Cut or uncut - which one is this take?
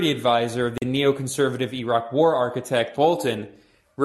cut